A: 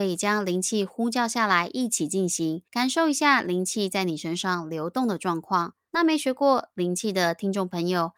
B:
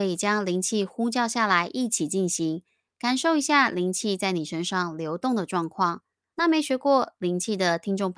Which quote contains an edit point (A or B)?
A